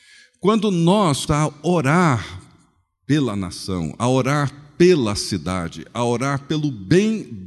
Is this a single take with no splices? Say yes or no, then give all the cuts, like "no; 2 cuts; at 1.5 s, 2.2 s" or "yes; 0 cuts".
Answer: no; 1 cut; at 1.3 s